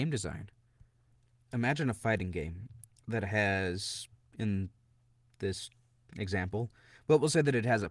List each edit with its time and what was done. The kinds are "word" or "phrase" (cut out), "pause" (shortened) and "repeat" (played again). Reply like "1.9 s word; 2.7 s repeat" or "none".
none